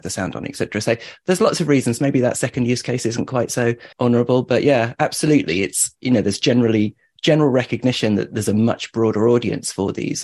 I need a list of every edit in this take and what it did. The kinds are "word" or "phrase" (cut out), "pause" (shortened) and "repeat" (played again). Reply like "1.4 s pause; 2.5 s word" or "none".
3.9 s pause